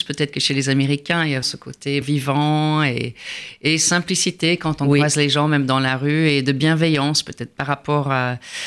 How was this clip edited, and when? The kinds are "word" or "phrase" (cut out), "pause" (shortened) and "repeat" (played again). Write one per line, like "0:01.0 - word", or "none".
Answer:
0:01.4 - word
0:02.0 - word